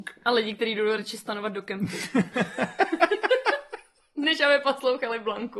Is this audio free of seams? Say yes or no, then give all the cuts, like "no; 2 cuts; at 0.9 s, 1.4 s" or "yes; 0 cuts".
yes; 0 cuts